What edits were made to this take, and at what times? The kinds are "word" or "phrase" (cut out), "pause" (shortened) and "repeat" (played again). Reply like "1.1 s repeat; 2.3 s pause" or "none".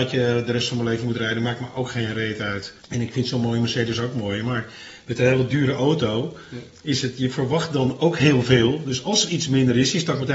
2.8 s pause